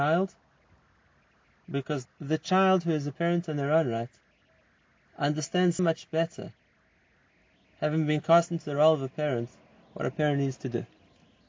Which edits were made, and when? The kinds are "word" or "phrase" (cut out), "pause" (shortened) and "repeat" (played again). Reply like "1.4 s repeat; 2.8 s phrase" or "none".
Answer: 2.1 s word; 5.8 s word